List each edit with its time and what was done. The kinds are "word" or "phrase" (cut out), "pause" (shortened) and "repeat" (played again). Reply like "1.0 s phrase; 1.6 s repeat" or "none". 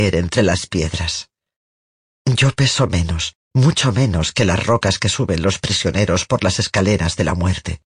none